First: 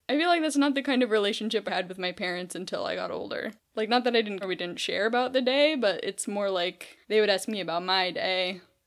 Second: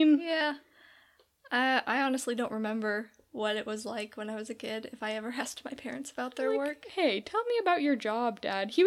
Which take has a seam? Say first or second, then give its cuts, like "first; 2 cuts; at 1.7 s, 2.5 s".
first; 4 cuts; at 1.7 s, 3.6 s, 4.4 s, 7.0 s